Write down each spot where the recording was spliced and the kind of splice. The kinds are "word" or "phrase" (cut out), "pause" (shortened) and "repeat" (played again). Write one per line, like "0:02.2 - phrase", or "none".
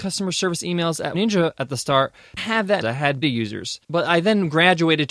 0:01.1 - word
0:02.4 - phrase
0:02.8 - phrase
0:03.2 - word
0:03.8 - pause